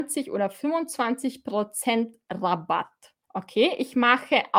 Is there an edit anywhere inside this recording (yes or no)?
yes